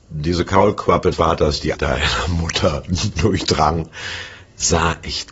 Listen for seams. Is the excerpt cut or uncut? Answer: cut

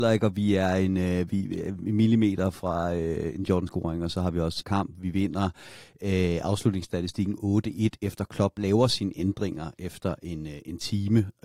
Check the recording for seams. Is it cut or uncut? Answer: cut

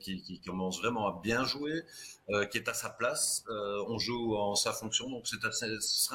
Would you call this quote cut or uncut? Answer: uncut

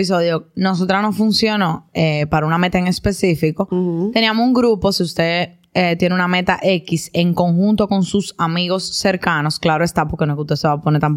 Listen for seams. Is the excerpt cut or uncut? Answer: uncut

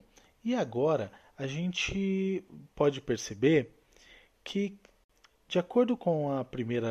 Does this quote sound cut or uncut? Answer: uncut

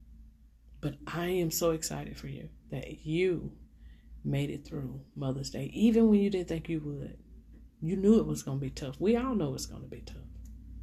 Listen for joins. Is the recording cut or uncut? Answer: uncut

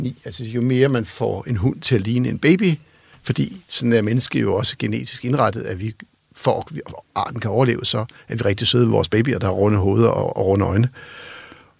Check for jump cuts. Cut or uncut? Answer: uncut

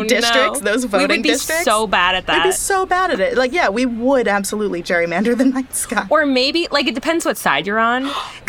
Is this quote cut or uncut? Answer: uncut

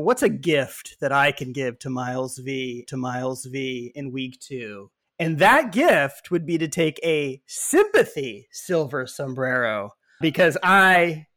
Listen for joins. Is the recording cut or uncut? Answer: cut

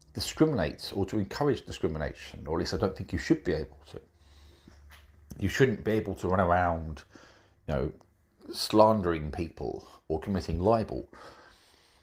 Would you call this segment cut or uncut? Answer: uncut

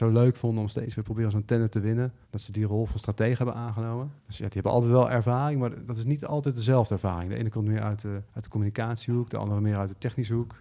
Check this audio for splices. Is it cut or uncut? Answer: cut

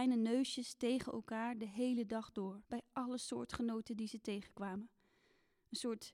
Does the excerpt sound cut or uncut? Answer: cut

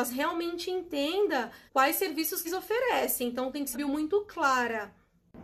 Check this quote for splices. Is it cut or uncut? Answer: cut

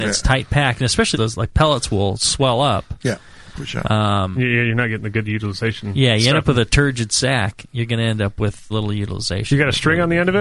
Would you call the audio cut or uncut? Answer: cut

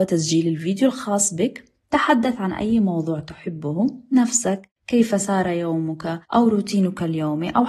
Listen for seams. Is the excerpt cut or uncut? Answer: cut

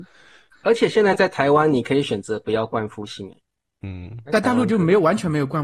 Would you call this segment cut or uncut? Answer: uncut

